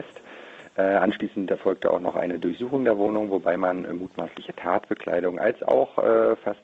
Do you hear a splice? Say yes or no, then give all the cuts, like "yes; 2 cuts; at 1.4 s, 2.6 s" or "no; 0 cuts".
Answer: no; 0 cuts